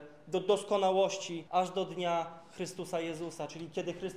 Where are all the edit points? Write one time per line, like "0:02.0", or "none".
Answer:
0:01.5

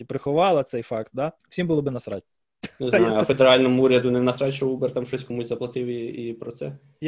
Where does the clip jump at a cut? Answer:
0:01.4

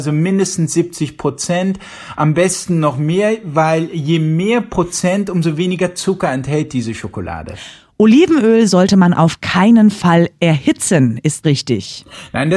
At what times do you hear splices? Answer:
0:11.4

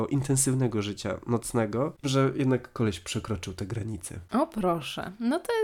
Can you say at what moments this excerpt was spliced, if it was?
0:02.0

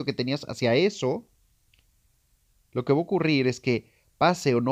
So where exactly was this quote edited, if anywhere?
none

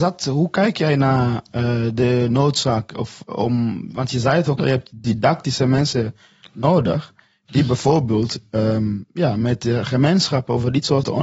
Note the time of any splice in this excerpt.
0:04.6

